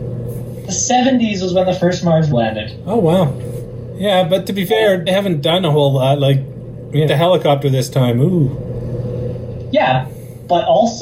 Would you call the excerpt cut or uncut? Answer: cut